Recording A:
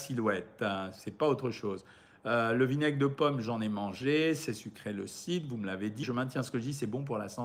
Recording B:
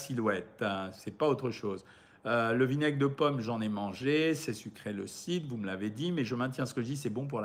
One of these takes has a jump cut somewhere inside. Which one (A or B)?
A